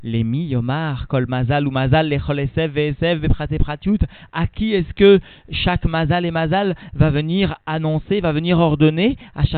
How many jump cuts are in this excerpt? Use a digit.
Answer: 0